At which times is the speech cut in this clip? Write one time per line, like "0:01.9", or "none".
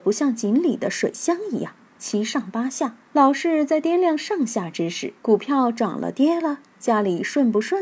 0:03.0
0:05.2

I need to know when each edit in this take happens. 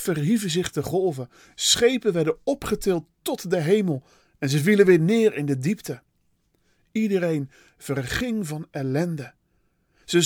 none

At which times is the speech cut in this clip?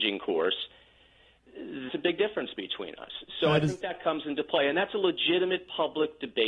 0:01.9

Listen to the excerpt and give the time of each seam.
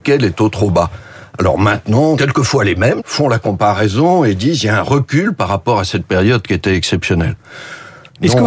0:02.1
0:03.0

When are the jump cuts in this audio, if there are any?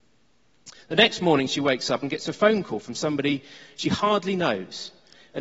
none

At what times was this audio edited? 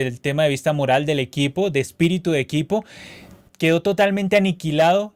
none

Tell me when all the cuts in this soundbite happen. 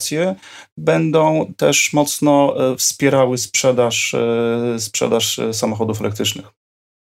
none

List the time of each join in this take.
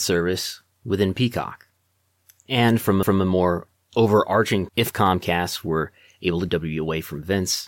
0:03.0
0:04.7
0:06.5

